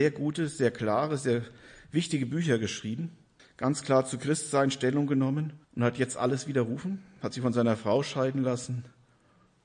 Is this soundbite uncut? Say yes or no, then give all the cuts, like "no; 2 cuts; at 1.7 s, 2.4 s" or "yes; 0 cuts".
no; 2 cuts; at 3.4 s, 5.6 s